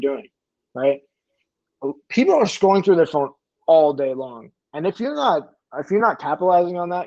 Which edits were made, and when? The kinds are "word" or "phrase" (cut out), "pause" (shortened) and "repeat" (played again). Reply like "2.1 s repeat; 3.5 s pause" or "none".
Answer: none